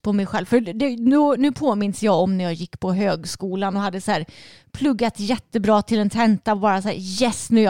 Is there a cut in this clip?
no; 0 cuts

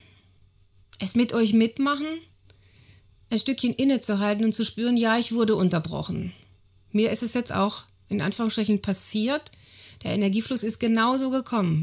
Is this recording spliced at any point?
no; 0 cuts

